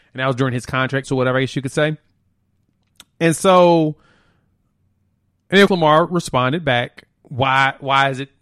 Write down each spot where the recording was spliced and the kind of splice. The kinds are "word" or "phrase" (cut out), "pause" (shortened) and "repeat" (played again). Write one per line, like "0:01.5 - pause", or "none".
0:01.0 - word
0:05.7 - word